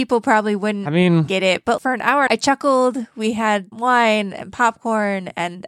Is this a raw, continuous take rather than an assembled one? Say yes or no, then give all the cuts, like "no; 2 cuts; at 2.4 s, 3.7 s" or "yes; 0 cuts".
no; 3 cuts; at 1.8 s, 2.3 s, 3.7 s